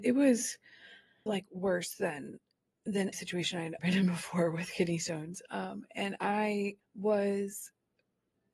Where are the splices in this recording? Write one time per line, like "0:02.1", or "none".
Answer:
0:01.3
0:03.1
0:03.8
0:06.8